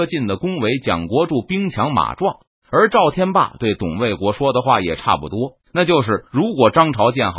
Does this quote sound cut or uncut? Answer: cut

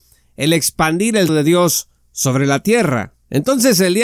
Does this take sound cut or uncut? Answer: cut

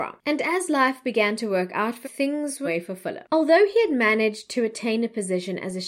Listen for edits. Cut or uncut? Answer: cut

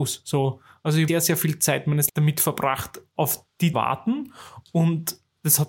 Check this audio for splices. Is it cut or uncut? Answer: cut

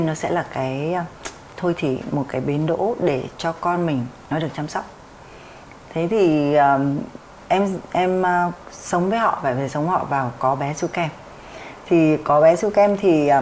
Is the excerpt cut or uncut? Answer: uncut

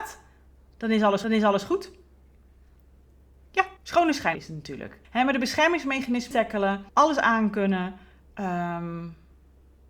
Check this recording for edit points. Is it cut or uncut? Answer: cut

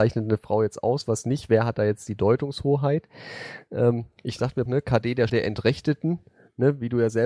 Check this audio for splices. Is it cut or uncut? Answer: cut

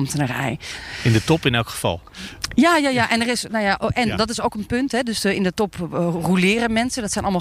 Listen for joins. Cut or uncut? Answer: uncut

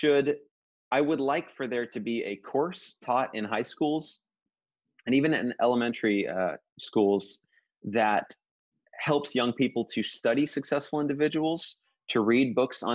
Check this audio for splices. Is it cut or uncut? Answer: uncut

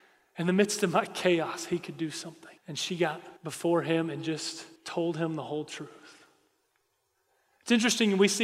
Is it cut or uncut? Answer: cut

